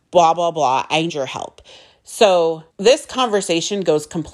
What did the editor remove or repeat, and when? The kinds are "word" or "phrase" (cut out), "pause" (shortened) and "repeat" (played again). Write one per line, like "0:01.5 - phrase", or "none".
0:01.1 - word
0:02.7 - pause